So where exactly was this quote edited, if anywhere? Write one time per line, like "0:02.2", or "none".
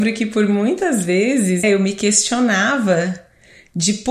0:01.6